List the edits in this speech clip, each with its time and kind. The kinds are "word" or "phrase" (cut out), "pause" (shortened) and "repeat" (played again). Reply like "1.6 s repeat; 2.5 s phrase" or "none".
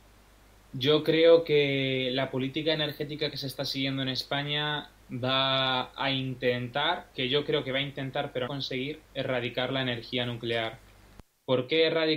5.0 s word; 7.1 s pause; 8.5 s word; 9.0 s pause